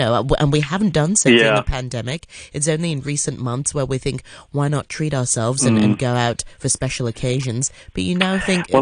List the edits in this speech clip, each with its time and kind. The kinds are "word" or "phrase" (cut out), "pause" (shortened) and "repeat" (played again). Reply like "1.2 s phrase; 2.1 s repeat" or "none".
none